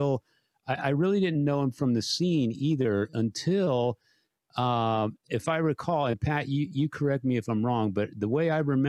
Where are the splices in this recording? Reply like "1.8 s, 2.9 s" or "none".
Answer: 5.2 s